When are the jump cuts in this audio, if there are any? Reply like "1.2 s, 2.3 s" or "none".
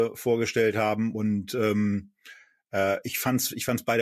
none